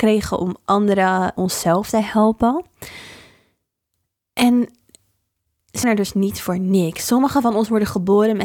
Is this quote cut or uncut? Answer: cut